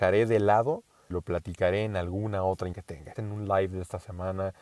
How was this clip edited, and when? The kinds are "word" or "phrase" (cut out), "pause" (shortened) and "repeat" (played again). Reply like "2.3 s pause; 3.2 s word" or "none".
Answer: 1.1 s word; 2.7 s word; 3.2 s word